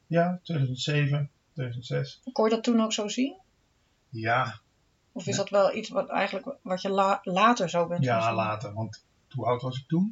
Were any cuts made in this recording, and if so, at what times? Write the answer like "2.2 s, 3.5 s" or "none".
none

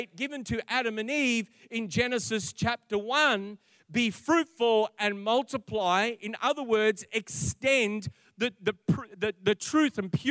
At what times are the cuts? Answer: none

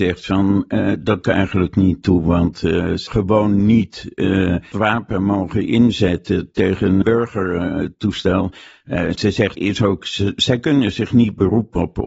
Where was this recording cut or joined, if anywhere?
1.2 s, 3.1 s, 4.7 s, 7.0 s, 9.6 s

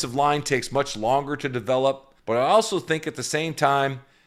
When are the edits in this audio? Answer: 2.2 s

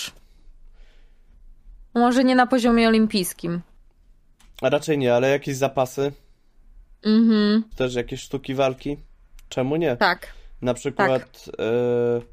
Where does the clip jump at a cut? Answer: 1.9 s, 7.7 s

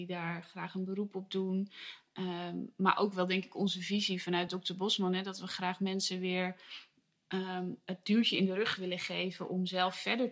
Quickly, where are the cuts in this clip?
none

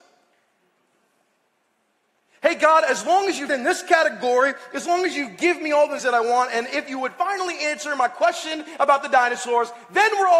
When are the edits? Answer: 3.5 s, 6.0 s

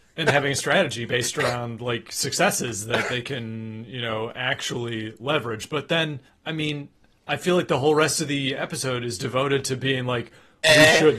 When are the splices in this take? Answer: 6.3 s

